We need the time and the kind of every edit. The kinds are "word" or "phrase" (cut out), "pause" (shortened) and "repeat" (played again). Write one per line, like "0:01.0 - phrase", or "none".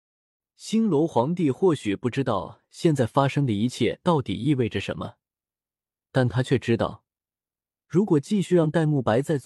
none